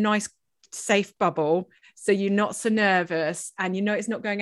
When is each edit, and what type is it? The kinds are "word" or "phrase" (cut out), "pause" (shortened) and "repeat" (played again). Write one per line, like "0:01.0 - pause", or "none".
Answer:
none